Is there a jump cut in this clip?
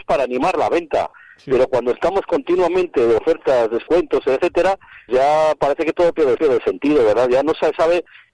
yes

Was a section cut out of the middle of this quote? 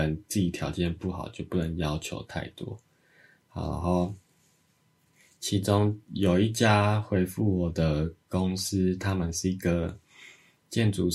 no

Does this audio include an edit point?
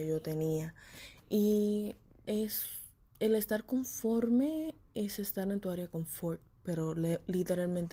no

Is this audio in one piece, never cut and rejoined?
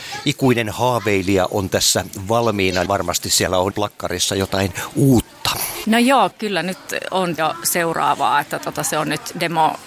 no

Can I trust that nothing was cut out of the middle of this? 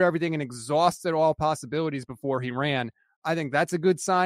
yes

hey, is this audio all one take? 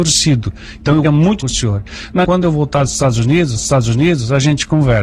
no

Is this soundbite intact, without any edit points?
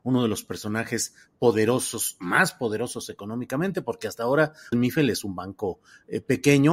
no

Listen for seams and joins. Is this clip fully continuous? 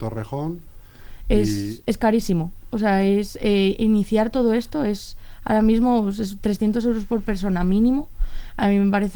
yes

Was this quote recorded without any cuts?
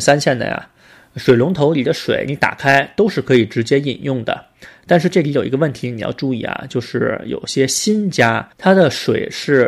no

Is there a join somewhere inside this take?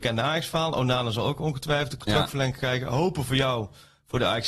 no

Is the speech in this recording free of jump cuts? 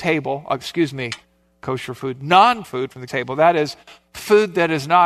no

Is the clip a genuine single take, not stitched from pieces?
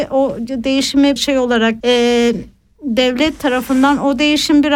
no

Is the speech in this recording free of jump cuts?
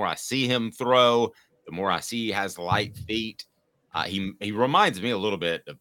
yes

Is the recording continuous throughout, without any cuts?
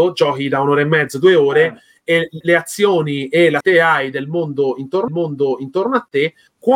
no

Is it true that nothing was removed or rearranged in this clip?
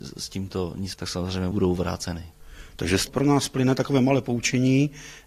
no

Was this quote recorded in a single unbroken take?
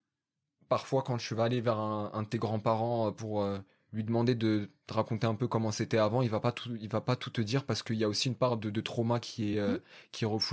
yes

